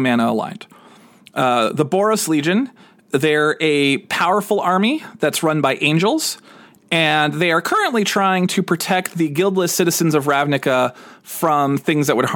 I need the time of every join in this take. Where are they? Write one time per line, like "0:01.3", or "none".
none